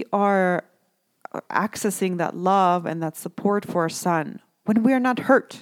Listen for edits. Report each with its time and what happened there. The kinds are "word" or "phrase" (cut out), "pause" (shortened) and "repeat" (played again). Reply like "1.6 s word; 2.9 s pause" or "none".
none